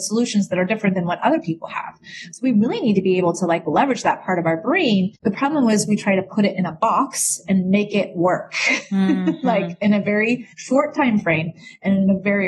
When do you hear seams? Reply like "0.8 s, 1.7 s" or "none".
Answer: 5.2 s, 10.5 s

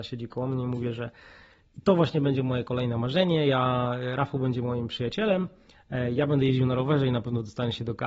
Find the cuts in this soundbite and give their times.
none

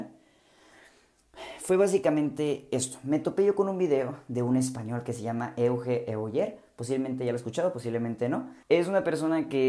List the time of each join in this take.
8.6 s

